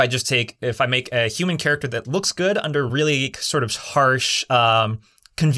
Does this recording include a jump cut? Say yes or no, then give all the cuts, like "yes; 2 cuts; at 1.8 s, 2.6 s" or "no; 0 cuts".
yes; 2 cuts; at 2.0 s, 2.9 s